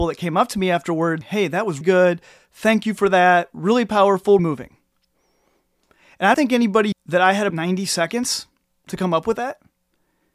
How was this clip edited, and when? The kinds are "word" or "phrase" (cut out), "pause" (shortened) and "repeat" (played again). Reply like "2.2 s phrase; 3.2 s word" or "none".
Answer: 1.2 s word; 1.8 s word; 4.4 s word; 6.3 s word; 6.9 s word; 7.5 s word